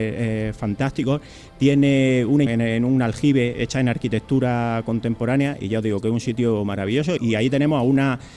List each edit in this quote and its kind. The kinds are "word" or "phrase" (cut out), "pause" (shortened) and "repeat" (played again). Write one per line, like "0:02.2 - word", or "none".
0:02.5 - word
0:03.5 - word
0:07.2 - word